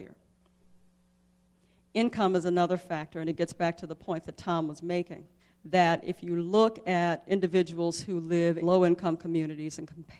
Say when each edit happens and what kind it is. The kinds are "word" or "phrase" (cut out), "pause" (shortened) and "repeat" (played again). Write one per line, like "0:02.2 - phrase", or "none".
0:05.4 - pause
0:08.6 - word

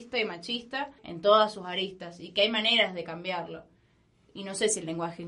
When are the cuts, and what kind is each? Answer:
0:01.0 - pause

